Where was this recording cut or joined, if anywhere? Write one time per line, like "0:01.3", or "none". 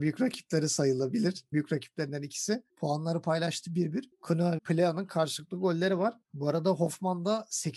0:01.5
0:04.6